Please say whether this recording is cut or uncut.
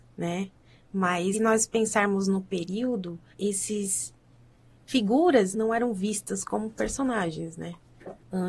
cut